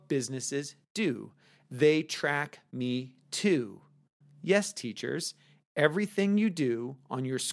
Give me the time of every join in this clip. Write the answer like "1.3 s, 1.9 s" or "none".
none